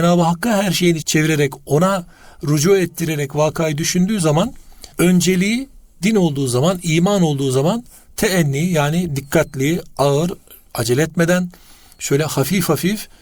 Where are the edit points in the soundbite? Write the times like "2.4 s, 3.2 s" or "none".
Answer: 1.0 s, 4.9 s